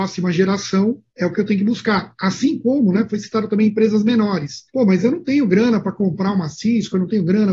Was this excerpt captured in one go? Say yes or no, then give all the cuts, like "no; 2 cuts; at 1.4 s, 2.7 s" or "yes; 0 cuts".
no; 2 cuts; at 1.1 s, 4.7 s